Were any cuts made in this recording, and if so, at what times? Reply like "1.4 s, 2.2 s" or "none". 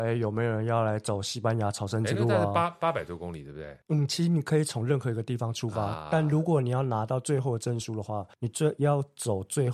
3.8 s, 8.3 s